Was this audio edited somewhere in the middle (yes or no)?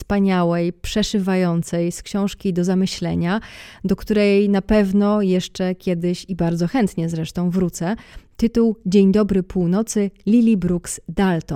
no